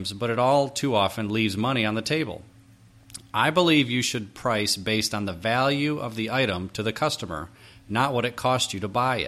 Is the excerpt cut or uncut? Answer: uncut